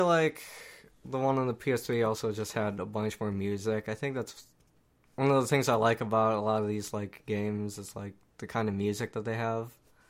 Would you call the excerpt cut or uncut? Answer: cut